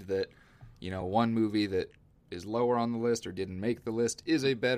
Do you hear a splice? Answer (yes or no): no